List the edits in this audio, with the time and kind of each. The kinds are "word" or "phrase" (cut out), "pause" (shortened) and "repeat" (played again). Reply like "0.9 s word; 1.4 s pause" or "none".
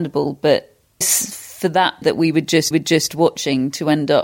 1.0 s word; 2.0 s word; 2.7 s repeat